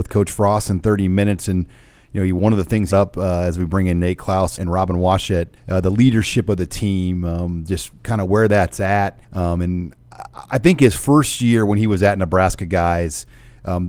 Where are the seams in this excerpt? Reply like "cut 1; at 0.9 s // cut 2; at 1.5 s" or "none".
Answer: cut 1; at 2.9 s // cut 2; at 4.6 s // cut 3; at 5.6 s // cut 4; at 9.2 s